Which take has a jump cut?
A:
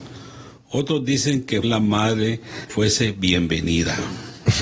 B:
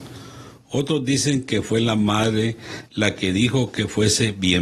A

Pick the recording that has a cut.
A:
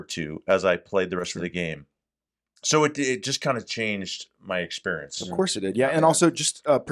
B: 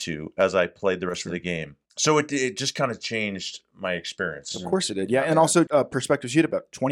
B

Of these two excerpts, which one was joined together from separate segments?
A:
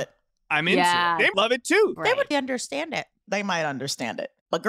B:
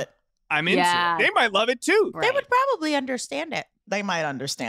A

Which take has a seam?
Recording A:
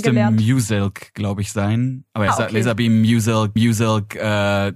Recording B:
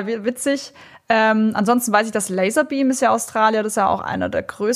A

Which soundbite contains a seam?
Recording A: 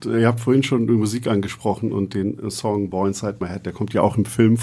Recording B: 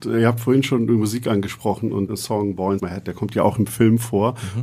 B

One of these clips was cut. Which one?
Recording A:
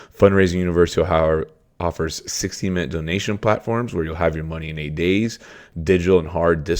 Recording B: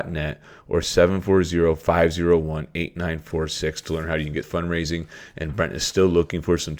B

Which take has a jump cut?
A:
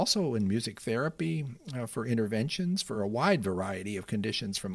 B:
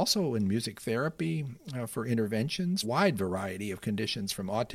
B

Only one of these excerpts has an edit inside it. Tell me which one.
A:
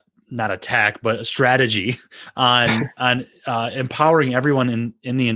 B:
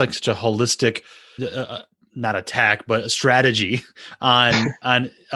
B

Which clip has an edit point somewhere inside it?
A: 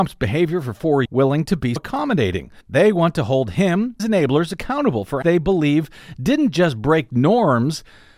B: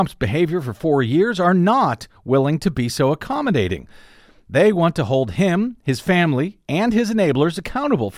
A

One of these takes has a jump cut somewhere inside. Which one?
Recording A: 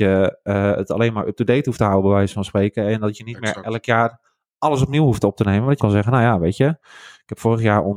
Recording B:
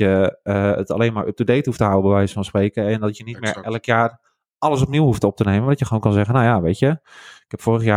A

